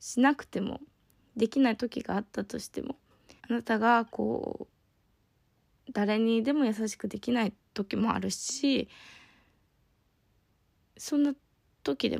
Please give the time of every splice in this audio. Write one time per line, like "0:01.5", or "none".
0:01.2
0:03.4